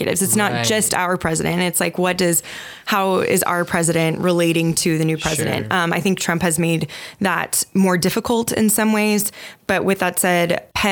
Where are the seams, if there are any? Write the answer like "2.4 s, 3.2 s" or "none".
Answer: none